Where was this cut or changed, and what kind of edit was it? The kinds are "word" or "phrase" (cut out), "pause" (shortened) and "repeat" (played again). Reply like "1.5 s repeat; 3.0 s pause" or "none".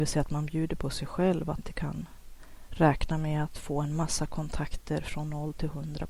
1.6 s word